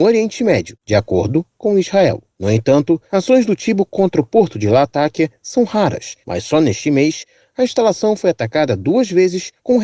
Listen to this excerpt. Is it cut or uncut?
uncut